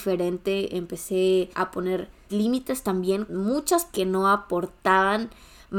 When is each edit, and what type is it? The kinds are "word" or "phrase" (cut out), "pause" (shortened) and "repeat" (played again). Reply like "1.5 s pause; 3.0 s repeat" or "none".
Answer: 1.5 s pause; 2.3 s word; 3.3 s word; 3.9 s word